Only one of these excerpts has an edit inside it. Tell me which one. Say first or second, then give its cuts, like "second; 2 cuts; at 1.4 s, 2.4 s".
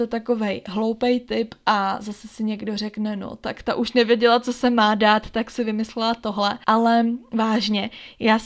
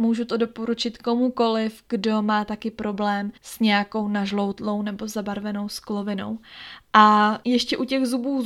second; 1 cut; at 3.4 s